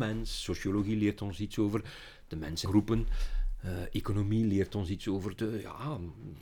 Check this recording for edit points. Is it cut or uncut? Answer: cut